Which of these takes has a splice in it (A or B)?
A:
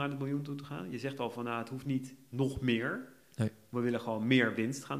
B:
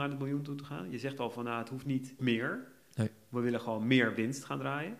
B